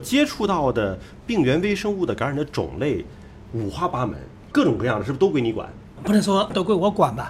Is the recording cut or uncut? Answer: uncut